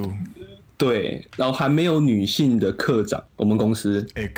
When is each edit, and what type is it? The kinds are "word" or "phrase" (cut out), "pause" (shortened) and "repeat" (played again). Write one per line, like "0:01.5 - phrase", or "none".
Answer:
0:03.3 - pause

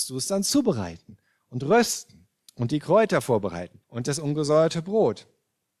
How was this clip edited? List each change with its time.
0:02.5 - pause
0:03.8 - pause

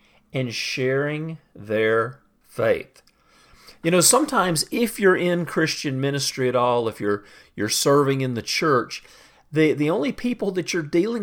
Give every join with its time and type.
none

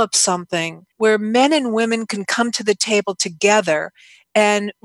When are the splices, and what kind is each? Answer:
0:00.9 - pause

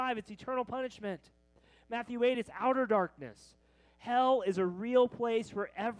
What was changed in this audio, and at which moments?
none

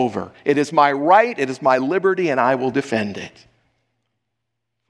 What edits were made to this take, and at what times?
none

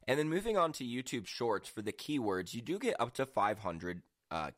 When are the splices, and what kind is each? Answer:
none

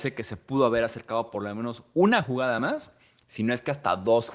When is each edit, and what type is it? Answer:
none

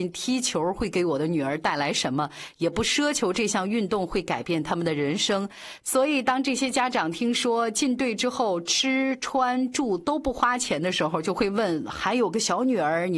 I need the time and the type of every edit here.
none

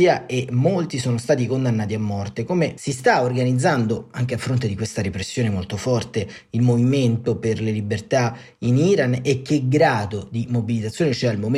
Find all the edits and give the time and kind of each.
none

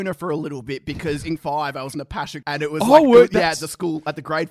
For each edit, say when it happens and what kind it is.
0:01.4 - word
0:01.9 - phrase
0:02.4 - word

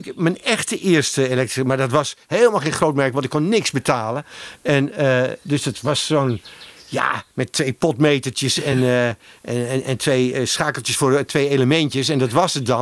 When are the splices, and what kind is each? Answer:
none

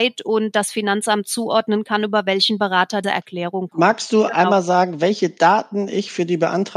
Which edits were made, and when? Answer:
0:03.0 - word

